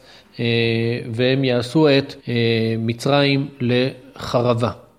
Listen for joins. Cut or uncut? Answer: cut